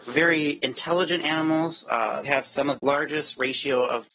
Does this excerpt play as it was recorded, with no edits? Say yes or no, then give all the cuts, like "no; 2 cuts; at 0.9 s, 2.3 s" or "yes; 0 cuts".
no; 2 cuts; at 2.2 s, 2.8 s